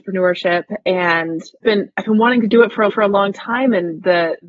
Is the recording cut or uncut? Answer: cut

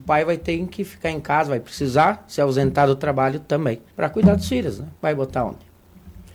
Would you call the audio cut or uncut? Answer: cut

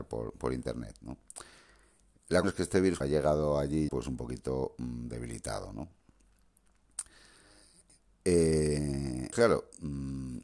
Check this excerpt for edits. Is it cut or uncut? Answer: cut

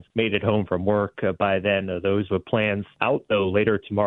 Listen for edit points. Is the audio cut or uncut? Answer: uncut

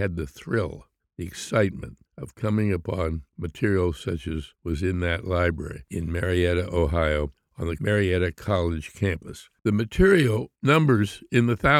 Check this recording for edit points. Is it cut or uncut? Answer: cut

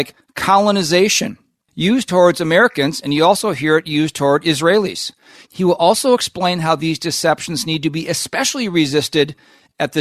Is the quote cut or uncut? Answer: uncut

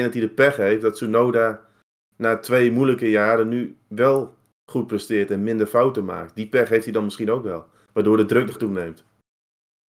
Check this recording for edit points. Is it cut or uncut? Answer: cut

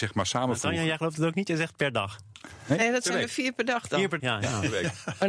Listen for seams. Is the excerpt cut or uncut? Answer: cut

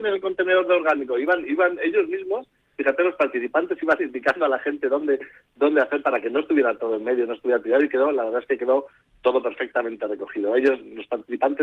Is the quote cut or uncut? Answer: uncut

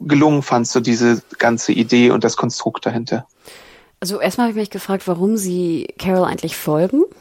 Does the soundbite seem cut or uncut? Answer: uncut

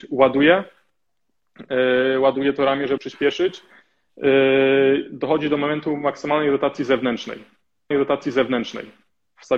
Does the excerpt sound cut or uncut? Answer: cut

